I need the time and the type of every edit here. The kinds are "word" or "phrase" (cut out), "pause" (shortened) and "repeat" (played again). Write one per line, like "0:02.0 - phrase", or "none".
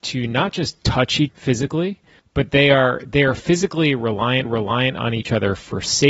0:01.3 - word
0:02.2 - pause
0:04.5 - repeat